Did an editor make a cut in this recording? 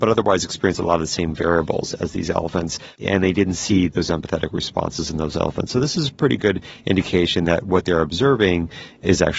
no; 0 cuts

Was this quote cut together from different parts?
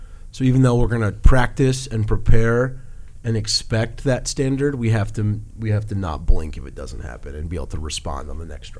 no; 0 cuts

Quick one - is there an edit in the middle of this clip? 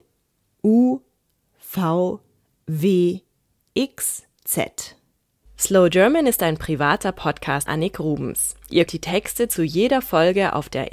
yes; 3 cuts; at 4.4 s, 7.7 s, 8.9 s

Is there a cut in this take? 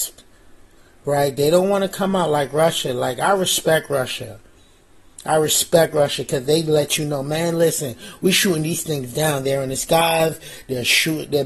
no; 0 cuts

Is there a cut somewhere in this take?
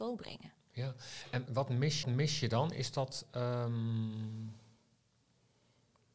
yes; 2 cuts; at 1.5 s, 2.0 s

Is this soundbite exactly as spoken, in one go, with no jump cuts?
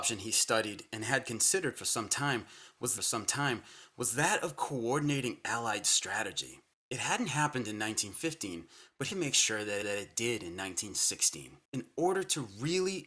no; 5 cuts; at 3.0 s, 6.7 s, 9.1 s, 9.8 s, 11.6 s

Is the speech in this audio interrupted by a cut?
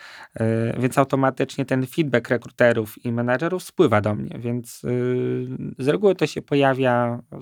no; 0 cuts

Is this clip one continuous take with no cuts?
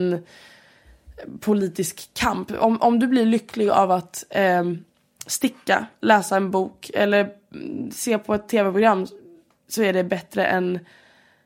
yes; 0 cuts

